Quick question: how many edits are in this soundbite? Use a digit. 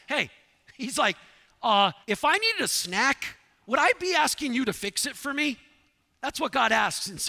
1